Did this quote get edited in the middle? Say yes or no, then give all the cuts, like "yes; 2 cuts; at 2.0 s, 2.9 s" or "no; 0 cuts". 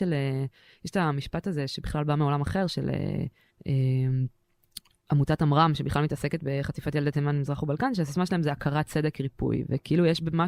yes; 1 cut; at 3.5 s